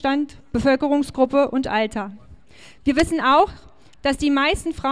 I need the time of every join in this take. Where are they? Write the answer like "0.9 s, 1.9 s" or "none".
none